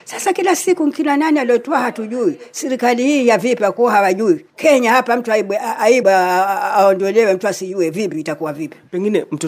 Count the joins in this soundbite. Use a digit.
2